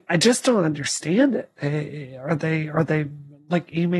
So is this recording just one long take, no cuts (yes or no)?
yes